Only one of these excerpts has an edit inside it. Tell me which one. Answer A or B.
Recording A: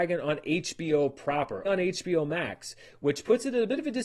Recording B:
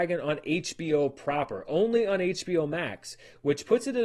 A